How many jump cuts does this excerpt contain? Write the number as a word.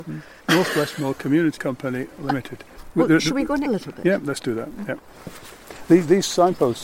two